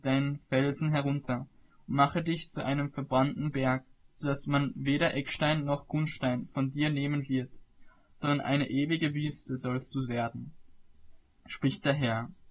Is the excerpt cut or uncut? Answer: uncut